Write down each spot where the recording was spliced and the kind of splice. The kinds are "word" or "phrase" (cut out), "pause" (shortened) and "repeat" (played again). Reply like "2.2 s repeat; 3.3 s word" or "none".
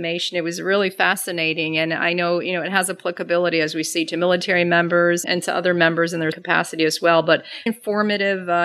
5.2 s word; 6.3 s word; 7.7 s word